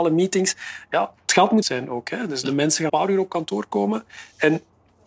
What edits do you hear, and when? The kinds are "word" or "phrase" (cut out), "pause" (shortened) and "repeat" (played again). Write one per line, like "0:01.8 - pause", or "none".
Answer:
0:01.6 - word
0:02.4 - word
0:02.9 - word

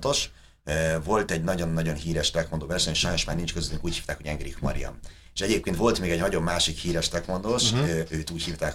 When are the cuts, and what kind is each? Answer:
none

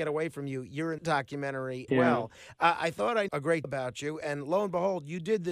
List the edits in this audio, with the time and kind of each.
0:01.0 - word
0:01.9 - word
0:03.3 - word
0:03.6 - word

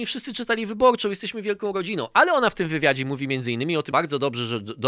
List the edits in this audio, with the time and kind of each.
0:03.9 - word

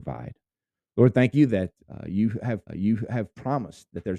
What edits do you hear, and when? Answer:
0:01.8 - pause
0:02.7 - repeat

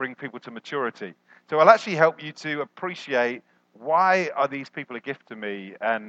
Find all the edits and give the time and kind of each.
none

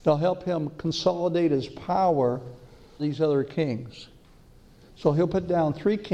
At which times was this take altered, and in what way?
0:03.0 - word

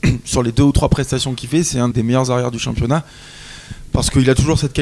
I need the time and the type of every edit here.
0:01.9 - word

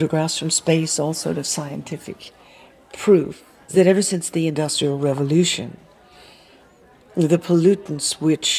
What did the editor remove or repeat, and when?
none

